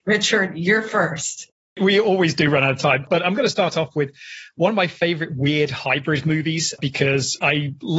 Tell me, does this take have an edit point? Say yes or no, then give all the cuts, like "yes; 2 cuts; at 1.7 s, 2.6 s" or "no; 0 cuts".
no; 0 cuts